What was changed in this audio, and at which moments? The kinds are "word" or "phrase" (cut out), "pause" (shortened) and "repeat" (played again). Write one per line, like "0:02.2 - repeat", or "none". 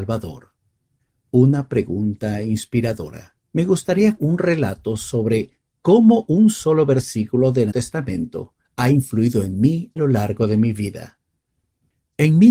0:01.0 - pause
0:03.4 - pause
0:04.2 - word
0:07.7 - word
0:08.6 - pause
0:10.0 - word